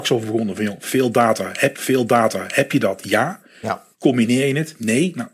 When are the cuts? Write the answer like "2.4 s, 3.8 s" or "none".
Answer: 1.7 s, 3.9 s